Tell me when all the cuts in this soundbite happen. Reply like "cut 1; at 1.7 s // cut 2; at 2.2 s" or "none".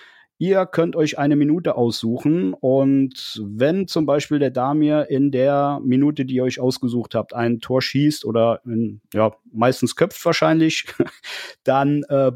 none